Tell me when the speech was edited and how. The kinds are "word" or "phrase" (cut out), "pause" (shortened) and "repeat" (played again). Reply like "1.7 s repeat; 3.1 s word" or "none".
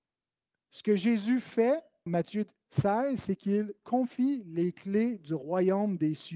2.1 s word